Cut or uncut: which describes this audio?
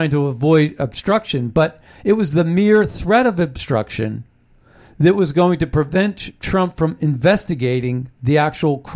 uncut